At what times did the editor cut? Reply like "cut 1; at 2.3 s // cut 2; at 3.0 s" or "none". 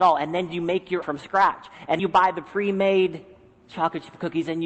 cut 1; at 1.0 s // cut 2; at 2.0 s